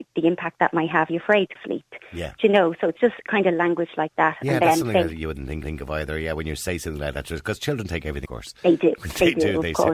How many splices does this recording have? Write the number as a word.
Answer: four